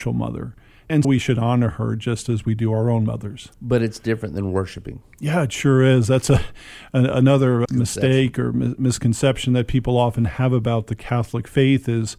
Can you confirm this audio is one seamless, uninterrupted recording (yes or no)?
no